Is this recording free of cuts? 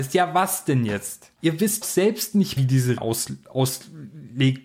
no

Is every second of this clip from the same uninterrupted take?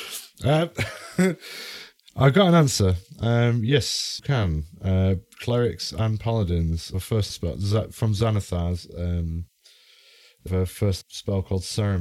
no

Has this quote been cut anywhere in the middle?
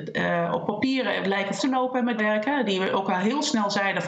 yes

